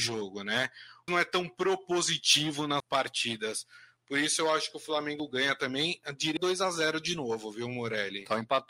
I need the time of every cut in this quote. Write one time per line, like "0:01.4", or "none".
0:01.1
0:02.8
0:06.4